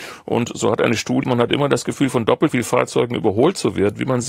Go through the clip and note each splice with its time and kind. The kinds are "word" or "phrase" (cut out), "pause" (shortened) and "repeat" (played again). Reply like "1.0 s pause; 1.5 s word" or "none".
1.2 s word; 2.5 s word